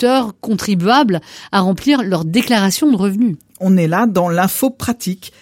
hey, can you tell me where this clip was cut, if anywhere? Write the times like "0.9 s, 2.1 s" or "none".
none

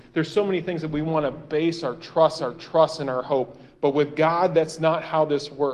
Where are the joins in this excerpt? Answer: 2.4 s

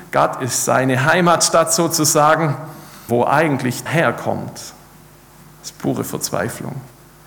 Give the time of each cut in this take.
3.1 s, 3.9 s

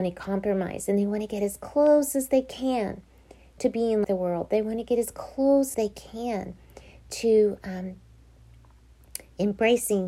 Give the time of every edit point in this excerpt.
4.0 s, 5.7 s

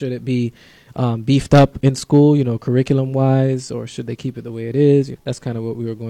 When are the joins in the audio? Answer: 5.2 s

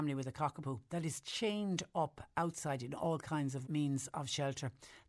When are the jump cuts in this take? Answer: 3.7 s

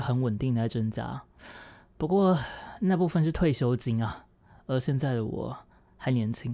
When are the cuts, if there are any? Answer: none

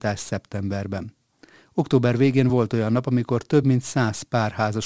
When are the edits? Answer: none

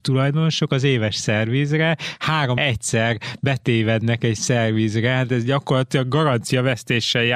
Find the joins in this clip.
2.6 s

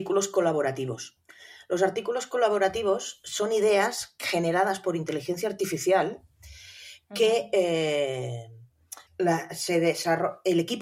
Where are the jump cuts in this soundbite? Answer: 9.1 s

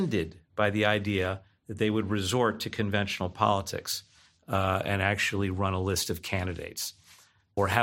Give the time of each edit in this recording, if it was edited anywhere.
none

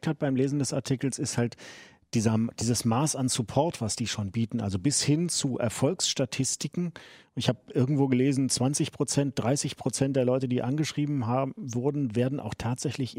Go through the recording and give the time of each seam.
none

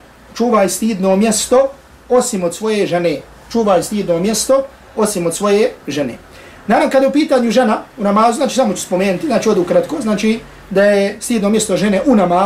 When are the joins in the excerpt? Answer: none

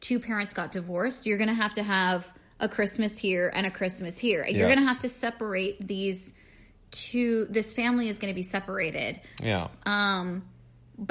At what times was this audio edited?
none

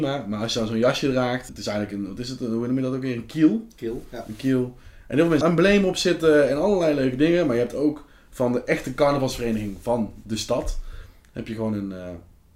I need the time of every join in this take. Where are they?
5.4 s

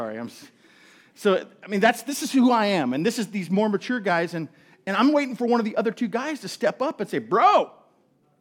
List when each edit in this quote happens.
none

